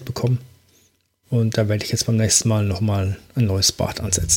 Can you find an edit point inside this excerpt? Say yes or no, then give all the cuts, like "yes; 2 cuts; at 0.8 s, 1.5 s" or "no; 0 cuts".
no; 0 cuts